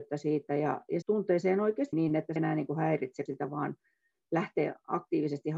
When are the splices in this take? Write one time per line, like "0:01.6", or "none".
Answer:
0:01.0
0:01.9
0:02.4
0:03.3